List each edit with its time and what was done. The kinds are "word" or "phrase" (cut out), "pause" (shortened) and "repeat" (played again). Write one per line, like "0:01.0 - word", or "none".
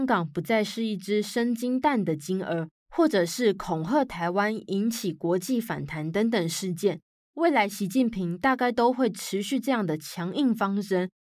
none